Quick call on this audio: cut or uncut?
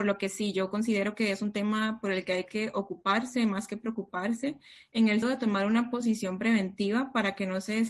cut